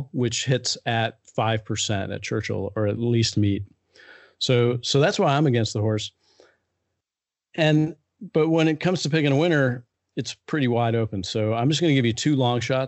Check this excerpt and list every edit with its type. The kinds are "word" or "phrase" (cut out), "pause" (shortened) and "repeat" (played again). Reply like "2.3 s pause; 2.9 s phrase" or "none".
3.3 s word